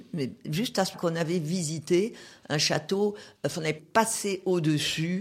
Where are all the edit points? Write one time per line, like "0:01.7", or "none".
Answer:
0:00.9
0:03.8